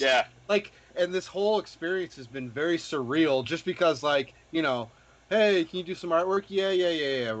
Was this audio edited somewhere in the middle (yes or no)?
no